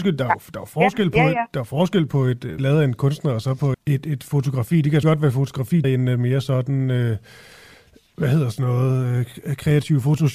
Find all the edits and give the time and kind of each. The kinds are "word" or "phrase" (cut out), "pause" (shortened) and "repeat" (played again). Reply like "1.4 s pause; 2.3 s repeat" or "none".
2.6 s word; 3.7 s word; 5.0 s word; 5.8 s word